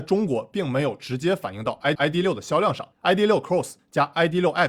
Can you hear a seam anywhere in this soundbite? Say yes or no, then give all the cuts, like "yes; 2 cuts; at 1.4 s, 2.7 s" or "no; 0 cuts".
yes; 2 cuts; at 2.0 s, 2.9 s